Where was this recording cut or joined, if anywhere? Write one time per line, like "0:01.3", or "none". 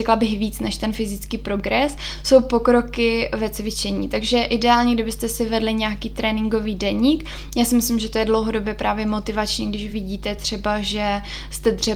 none